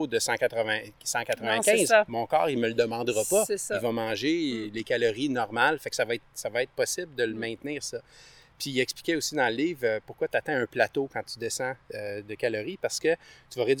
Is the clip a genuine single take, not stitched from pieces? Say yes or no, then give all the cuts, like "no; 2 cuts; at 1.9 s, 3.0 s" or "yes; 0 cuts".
no; 1 cut; at 6.7 s